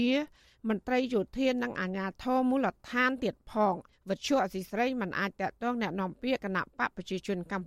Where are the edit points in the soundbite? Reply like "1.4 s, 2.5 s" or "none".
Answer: 3.9 s